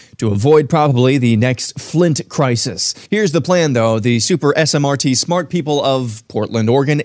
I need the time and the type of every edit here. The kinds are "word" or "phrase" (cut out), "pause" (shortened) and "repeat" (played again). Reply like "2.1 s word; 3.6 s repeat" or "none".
3.1 s pause